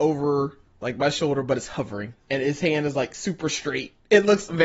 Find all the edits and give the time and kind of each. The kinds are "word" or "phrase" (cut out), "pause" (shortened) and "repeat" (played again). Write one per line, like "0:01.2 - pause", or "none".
0:02.2 - pause